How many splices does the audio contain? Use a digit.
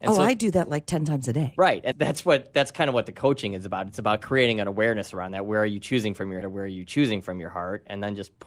2